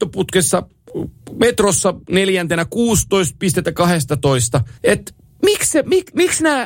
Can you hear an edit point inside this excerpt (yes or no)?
yes